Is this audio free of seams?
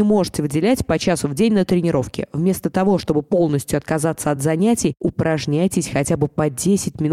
yes; 0 cuts

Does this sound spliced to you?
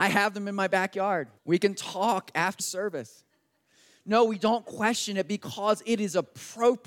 yes; 2 cuts; at 1.4 s, 2.6 s

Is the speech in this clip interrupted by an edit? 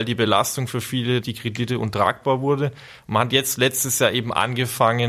yes; 1 cut; at 1.2 s

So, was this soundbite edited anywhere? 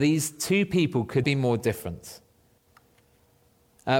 yes; 1 cut; at 1.2 s

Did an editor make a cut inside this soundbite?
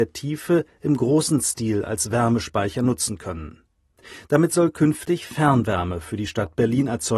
no; 0 cuts

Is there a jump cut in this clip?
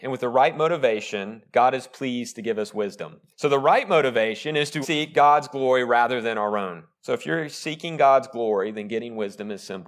yes; 3 cuts; at 3.3 s, 4.8 s, 6.9 s

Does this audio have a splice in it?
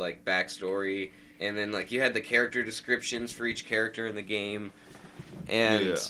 yes; 1 cut; at 1.3 s

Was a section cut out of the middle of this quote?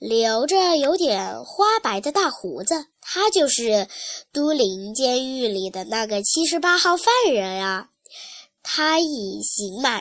yes; 1 cut; at 2.9 s

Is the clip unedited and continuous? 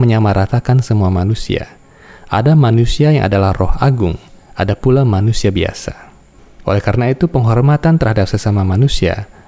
yes; 0 cuts

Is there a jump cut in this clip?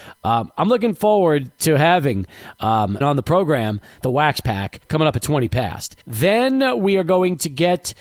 yes; 4 cuts; at 3.0 s, 4.0 s, 4.8 s, 6.0 s

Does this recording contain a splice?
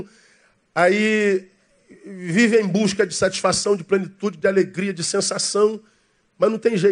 no; 0 cuts

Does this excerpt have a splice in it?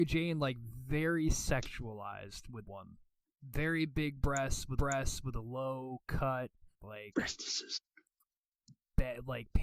yes; 4 cuts; at 2.7 s, 3.2 s, 4.8 s, 6.7 s

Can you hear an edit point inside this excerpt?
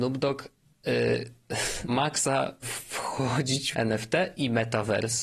yes; 3 cuts; at 1.9 s, 2.6 s, 3.7 s

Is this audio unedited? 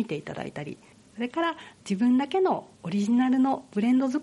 no; 1 cut; at 2.7 s

